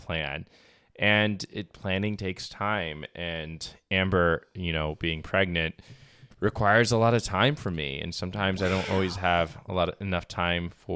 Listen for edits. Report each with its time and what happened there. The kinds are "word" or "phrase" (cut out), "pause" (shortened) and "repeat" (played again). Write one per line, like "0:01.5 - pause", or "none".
0:06.3 - pause